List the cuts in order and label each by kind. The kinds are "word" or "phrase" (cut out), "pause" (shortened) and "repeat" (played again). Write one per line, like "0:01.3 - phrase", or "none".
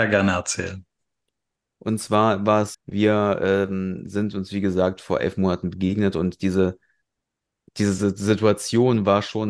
0:02.7 - word